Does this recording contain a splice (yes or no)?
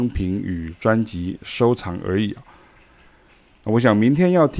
no